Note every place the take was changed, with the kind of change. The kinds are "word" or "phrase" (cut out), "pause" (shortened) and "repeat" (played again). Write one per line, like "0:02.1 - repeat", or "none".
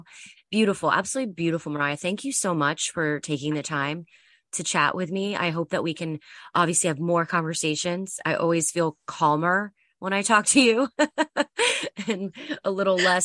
none